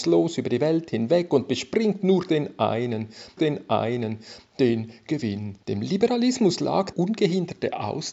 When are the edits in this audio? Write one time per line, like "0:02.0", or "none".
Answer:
0:03.4
0:05.6
0:06.9